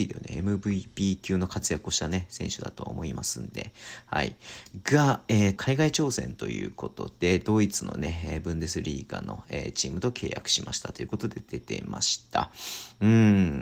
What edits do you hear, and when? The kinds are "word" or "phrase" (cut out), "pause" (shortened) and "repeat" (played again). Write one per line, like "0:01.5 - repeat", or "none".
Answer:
0:05.6 - phrase